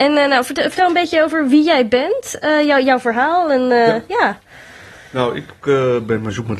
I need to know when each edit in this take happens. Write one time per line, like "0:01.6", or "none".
none